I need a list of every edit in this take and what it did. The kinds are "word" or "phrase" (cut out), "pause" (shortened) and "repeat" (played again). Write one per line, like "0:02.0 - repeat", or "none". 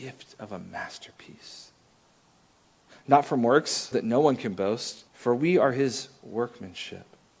0:03.9 - word
0:05.1 - pause